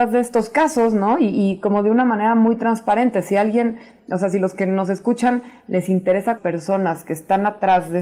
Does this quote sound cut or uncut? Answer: cut